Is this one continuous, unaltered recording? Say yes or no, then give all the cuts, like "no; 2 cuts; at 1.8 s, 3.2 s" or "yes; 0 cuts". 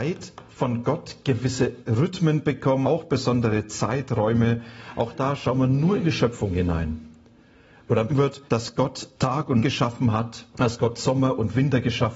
no; 6 cuts; at 2.8 s, 8.1 s, 8.5 s, 9.1 s, 9.6 s, 10.5 s